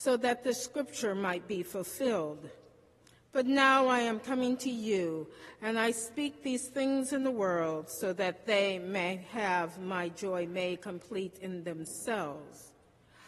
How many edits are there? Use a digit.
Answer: 0